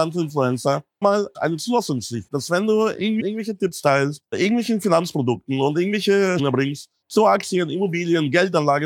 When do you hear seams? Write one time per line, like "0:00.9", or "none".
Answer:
0:01.0
0:01.3
0:02.3
0:03.2
0:04.3
0:06.4

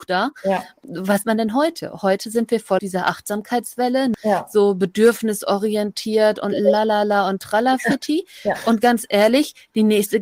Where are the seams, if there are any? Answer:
0:01.2
0:02.8

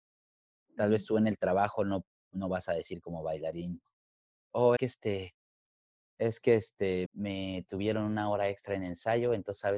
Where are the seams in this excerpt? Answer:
0:04.8
0:07.1

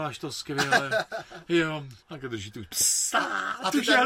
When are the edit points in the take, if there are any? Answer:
0:02.0

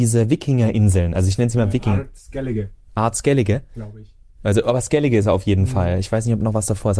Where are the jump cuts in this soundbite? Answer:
none

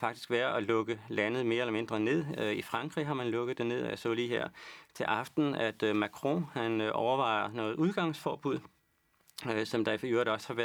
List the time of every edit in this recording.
none

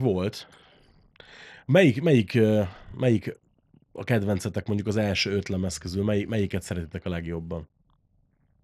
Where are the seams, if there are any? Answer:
none

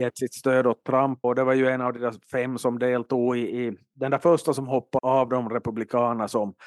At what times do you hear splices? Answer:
0:01.2
0:05.0

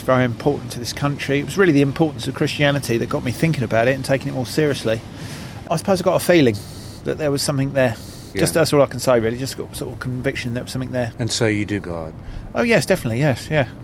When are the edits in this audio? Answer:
0:11.8

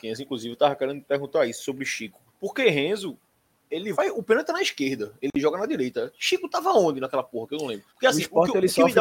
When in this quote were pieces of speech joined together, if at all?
0:02.3
0:03.9
0:07.9

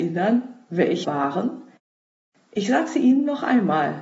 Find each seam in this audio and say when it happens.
0:01.0

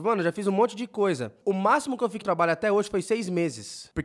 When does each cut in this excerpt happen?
0:02.2

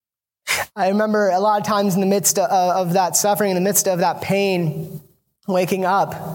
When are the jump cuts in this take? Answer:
none

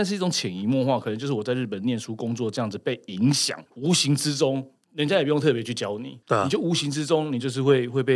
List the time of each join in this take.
0:03.7
0:06.2

